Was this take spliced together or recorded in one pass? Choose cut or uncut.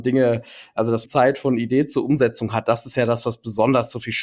cut